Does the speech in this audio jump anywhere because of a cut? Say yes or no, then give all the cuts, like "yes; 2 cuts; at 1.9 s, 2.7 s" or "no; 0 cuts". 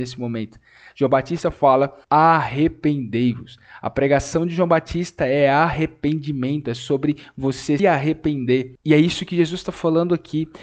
yes; 2 cuts; at 2.0 s, 7.8 s